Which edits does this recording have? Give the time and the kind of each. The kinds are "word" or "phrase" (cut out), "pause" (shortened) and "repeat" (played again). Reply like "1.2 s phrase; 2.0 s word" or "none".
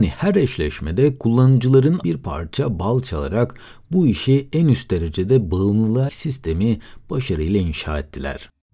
2.0 s word; 6.1 s word

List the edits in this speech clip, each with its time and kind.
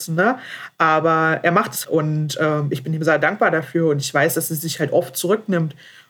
1.8 s word

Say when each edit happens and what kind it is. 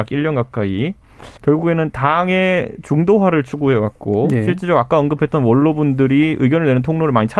1.4 s pause

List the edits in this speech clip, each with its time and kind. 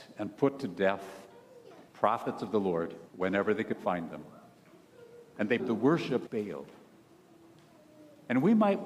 1.9 s pause; 3.1 s pause; 5.6 s word; 6.3 s phrase

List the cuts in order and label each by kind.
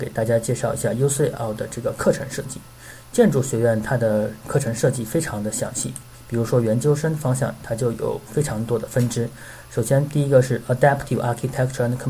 none

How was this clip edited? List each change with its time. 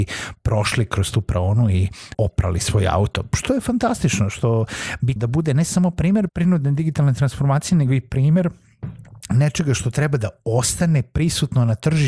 2.1 s word; 5.2 s word; 6.3 s word

